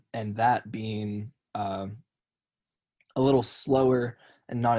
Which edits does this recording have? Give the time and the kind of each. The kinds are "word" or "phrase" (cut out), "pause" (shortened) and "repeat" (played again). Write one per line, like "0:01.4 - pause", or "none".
none